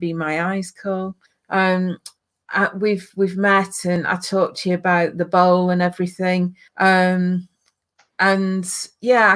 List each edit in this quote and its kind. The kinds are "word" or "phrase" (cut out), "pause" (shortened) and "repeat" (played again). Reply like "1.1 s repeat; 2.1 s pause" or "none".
1.2 s pause; 6.7 s pause